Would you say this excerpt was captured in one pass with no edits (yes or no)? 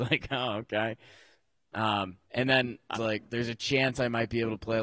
no